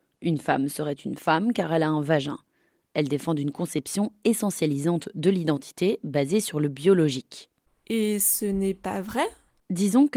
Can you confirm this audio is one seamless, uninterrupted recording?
yes; 0 cuts

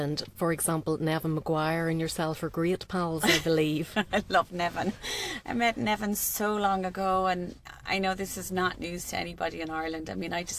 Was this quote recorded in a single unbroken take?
yes; 0 cuts

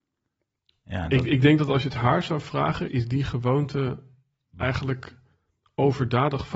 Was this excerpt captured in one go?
no; 1 cut; at 2.9 s

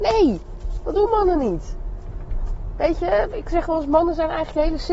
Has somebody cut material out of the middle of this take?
no; 0 cuts

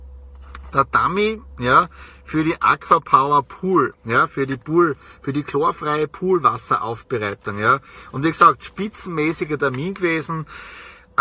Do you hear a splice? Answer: no; 0 cuts

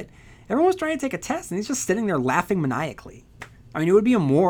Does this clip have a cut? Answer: no; 0 cuts

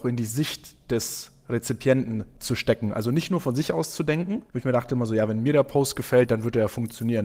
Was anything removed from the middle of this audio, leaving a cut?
no; 0 cuts

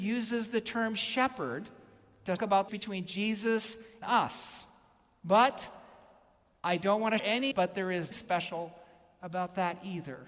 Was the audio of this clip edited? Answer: yes; 6 cuts; at 2.4 s, 2.7 s, 4.0 s, 7.2 s, 7.5 s, 8.1 s

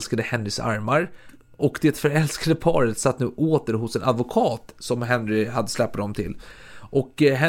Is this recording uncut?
yes; 0 cuts

